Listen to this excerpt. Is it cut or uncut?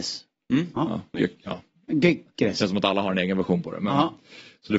uncut